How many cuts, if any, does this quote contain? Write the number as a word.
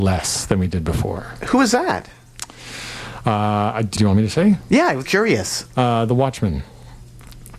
two